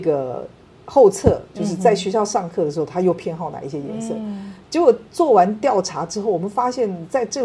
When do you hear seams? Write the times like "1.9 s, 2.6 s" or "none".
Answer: 5.1 s

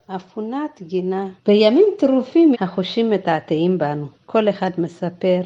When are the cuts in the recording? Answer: 1.4 s, 2.5 s, 4.1 s

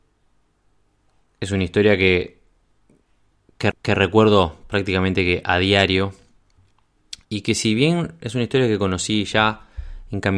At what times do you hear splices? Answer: 3.7 s, 7.2 s

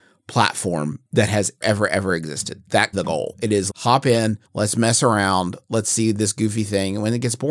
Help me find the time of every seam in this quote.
1.1 s, 1.6 s, 2.9 s, 3.7 s, 4.5 s

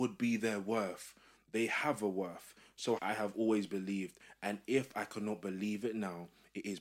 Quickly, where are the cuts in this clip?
3.0 s

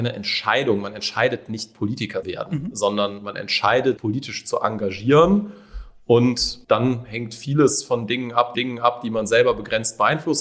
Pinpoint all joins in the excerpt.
2.2 s, 4.0 s, 6.6 s, 8.5 s

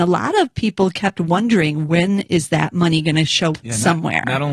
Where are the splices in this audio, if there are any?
3.5 s

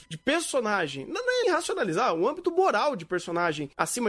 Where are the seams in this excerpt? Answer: 1.4 s

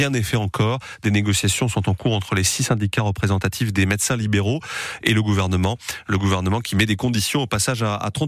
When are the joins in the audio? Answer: none

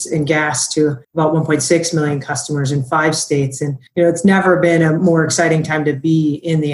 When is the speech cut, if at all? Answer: 1.0 s, 3.9 s

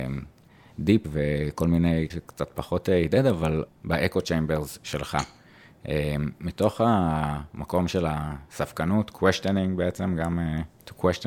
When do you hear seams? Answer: 1.0 s, 2.1 s, 3.7 s

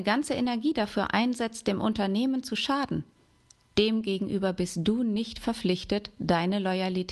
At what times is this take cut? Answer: none

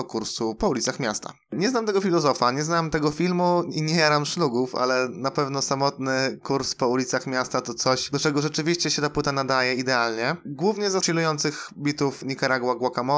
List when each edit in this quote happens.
11.0 s

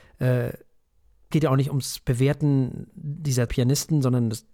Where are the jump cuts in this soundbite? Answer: 1.3 s, 3.5 s

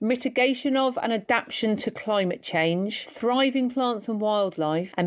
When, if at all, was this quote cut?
none

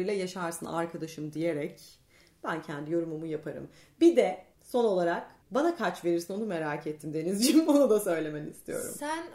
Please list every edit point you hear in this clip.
4.5 s, 5.4 s

